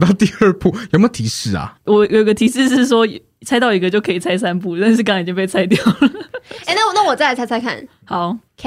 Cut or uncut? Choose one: cut